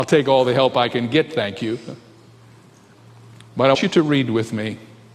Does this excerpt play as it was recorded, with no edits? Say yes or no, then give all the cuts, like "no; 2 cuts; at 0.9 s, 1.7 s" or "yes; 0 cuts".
no; 1 cut; at 3.7 s